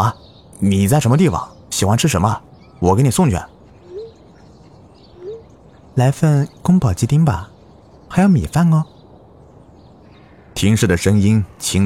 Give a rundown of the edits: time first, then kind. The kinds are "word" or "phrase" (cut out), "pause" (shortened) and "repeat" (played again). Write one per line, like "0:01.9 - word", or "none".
none